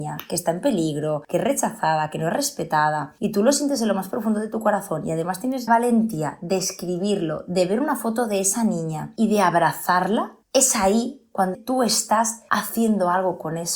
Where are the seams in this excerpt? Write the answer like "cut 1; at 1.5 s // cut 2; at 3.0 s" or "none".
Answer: cut 1; at 5.7 s // cut 2; at 10.4 s // cut 3; at 11.5 s